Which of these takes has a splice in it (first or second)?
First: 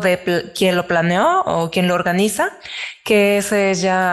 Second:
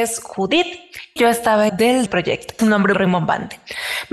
second